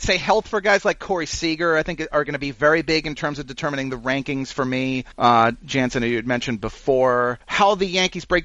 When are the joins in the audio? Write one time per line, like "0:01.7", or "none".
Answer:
0:05.1
0:07.4